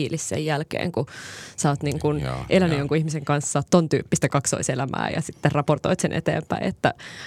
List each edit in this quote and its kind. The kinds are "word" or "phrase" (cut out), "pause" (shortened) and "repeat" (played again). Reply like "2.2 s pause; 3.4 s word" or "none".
none